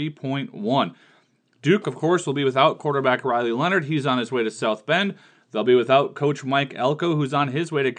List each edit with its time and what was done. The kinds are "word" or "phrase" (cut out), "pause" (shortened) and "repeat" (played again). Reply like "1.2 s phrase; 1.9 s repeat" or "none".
none